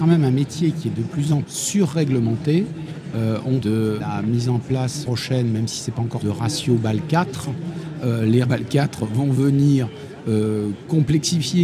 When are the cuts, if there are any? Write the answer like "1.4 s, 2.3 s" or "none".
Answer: 1.4 s, 3.6 s, 4.0 s, 5.0 s, 6.2 s, 8.4 s